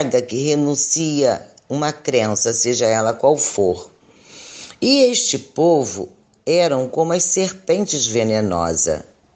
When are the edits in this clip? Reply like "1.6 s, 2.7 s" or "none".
none